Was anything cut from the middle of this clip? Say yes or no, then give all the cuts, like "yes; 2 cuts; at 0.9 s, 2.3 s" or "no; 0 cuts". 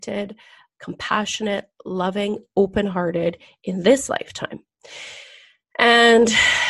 no; 0 cuts